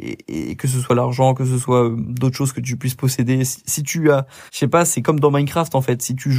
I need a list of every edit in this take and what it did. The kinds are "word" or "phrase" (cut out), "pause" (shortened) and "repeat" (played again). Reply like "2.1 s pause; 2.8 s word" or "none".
4.5 s pause